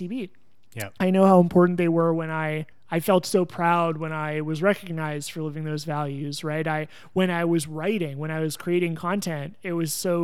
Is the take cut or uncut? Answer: cut